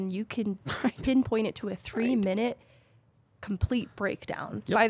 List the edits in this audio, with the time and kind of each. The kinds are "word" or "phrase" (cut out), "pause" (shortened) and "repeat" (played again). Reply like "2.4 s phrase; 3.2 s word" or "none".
none